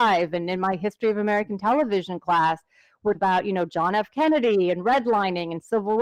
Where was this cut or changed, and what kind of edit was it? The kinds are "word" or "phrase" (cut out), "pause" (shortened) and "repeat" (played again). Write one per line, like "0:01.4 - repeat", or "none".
0:03.1 - word